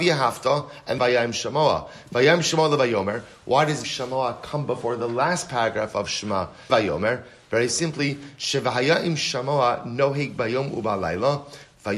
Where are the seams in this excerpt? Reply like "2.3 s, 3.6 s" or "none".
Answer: 1.0 s, 3.8 s, 6.7 s

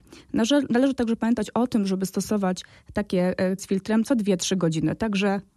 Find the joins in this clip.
3.6 s

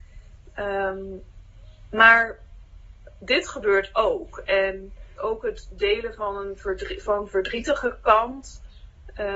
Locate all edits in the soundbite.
5.2 s

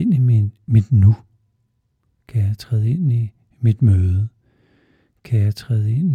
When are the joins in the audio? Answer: none

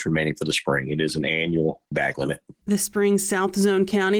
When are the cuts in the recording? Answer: none

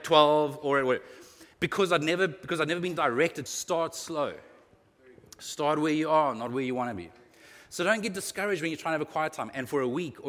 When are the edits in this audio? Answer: 1.5 s, 3.5 s

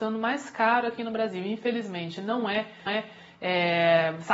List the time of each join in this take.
2.9 s

